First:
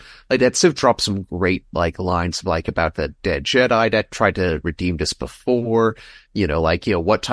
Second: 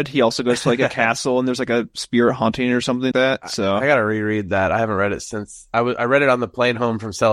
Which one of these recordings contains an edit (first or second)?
second